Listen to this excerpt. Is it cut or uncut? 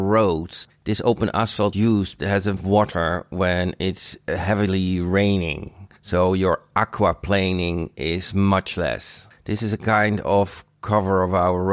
cut